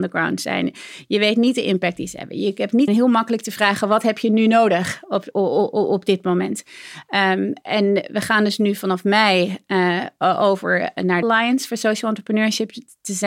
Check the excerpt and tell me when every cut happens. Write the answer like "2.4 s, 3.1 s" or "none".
2.9 s, 5.3 s, 7.6 s, 11.2 s